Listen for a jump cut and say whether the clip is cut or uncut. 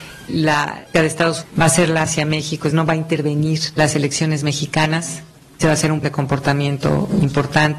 cut